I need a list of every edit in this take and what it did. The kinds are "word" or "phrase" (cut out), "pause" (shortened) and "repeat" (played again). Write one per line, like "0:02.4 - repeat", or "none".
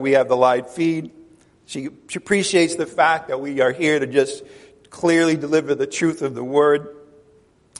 none